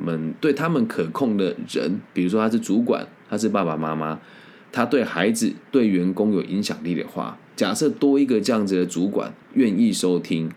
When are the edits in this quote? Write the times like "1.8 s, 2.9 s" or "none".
9.4 s